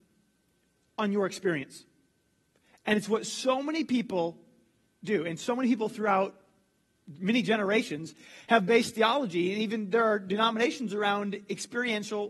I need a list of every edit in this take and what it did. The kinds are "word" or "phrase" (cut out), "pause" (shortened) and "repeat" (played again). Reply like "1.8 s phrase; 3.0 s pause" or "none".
none